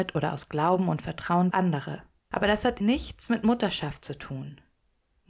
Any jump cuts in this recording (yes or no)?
yes